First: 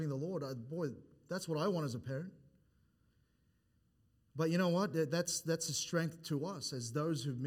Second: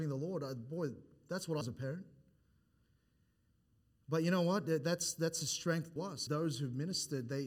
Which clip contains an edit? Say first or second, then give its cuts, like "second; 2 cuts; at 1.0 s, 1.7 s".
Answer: second; 3 cuts; at 1.6 s, 6.0 s, 6.3 s